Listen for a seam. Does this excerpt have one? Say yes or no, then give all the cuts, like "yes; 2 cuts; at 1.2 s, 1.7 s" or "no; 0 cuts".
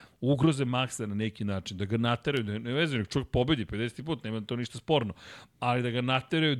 no; 0 cuts